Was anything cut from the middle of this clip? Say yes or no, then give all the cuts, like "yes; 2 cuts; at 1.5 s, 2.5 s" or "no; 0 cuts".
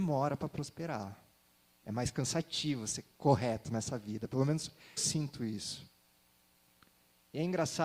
yes; 1 cut; at 5.0 s